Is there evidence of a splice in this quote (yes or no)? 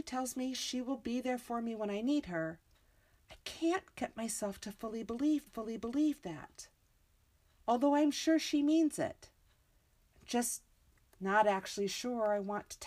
yes